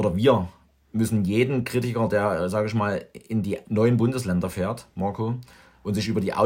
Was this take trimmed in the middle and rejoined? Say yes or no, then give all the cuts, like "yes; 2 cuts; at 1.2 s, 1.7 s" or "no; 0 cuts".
no; 0 cuts